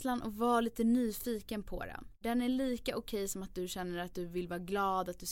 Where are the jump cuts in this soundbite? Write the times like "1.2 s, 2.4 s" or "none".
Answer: none